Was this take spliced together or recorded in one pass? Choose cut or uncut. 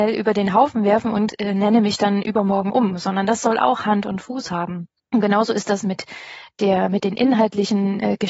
cut